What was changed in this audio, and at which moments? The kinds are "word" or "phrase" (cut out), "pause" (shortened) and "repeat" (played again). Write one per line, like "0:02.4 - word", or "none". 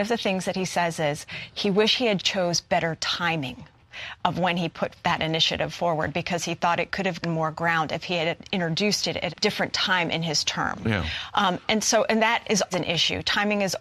0:02.2 - word
0:07.2 - word
0:09.3 - word
0:11.6 - word
0:12.7 - word